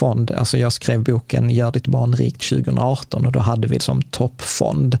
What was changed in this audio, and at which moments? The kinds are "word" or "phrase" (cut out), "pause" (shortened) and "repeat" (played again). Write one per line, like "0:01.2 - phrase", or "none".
0:03.8 - word